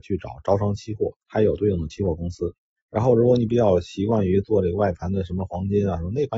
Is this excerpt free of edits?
no; 2 cuts; at 1.2 s, 2.8 s

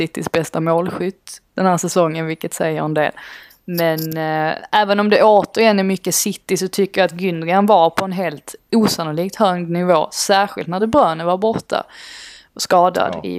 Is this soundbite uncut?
yes; 0 cuts

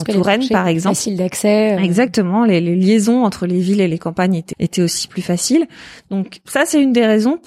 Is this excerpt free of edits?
no; 2 cuts; at 4.5 s, 5.1 s

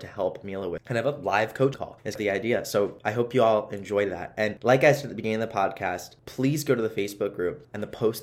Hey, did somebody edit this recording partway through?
no; 0 cuts

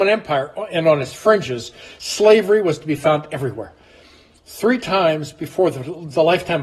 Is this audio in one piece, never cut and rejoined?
yes; 0 cuts

